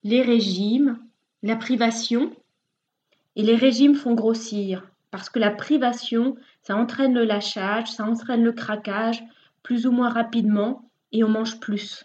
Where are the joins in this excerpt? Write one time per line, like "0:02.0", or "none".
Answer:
none